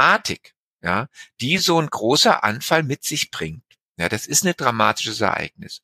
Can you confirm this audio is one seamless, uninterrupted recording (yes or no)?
yes